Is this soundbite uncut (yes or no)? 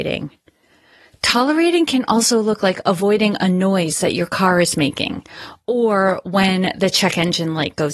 yes